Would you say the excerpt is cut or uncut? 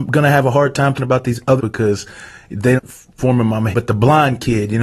cut